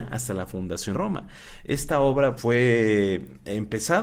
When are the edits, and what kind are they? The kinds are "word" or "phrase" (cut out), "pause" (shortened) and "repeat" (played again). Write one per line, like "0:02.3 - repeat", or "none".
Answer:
0:00.9 - word
0:02.4 - word